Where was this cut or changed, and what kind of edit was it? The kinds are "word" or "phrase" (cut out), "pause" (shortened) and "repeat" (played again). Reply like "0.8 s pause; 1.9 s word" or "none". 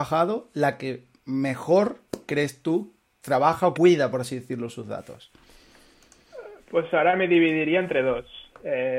3.1 s word; 3.7 s word